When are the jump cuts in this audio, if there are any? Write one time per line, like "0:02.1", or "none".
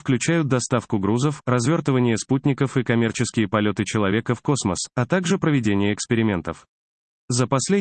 none